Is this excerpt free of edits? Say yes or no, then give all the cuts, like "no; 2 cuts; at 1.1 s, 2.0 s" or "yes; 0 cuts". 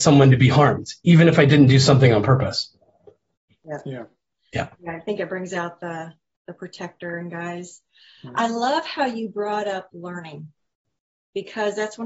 yes; 0 cuts